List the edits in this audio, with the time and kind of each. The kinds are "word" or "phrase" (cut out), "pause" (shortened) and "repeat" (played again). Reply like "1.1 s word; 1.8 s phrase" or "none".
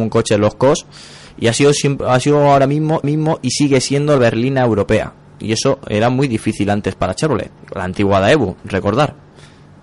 3.0 s repeat; 4.2 s phrase; 7.6 s pause